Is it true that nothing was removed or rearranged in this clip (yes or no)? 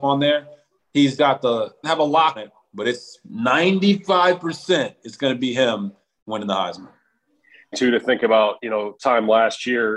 no